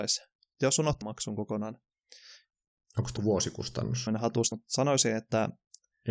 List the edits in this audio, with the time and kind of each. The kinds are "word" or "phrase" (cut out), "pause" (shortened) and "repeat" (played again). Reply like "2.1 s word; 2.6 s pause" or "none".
1.0 s word; 3.2 s word; 4.1 s word; 4.5 s word